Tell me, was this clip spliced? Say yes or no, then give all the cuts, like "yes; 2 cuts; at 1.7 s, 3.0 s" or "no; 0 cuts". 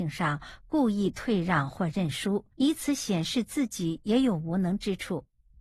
yes; 1 cut; at 2.5 s